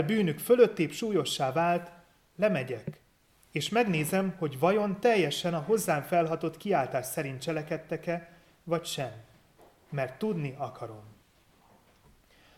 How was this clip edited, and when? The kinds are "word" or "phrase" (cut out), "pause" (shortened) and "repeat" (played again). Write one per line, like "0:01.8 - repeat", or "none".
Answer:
none